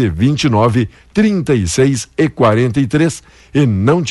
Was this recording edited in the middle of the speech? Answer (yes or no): no